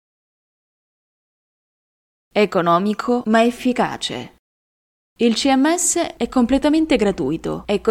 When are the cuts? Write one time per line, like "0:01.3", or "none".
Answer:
none